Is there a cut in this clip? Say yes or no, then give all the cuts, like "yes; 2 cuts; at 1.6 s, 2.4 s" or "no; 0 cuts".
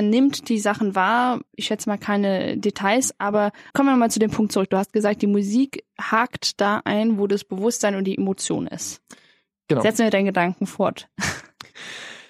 yes; 2 cuts; at 1.5 s, 3.7 s